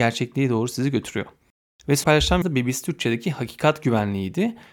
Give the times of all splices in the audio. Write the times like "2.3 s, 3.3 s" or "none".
2.0 s, 2.4 s

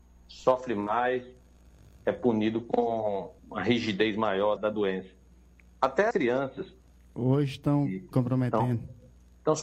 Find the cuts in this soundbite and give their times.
3.4 s, 4.6 s, 6.1 s, 8.1 s

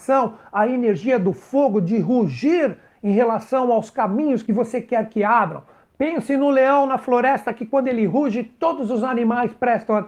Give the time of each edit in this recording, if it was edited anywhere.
none

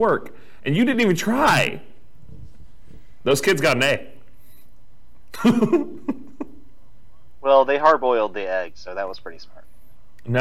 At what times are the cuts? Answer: none

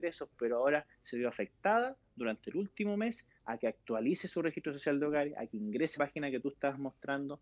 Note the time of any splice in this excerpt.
6.0 s

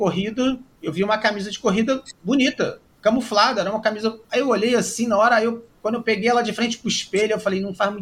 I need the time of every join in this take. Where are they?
4.2 s

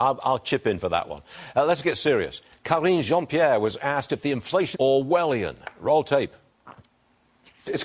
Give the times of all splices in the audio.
4.7 s

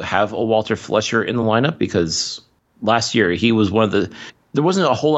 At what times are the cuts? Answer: none

